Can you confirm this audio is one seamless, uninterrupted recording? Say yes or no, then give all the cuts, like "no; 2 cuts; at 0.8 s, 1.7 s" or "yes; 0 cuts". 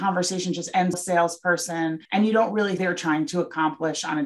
no; 3 cuts; at 0.9 s, 2.0 s, 2.8 s